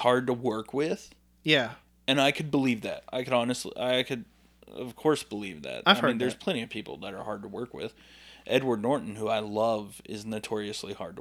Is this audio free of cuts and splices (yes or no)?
yes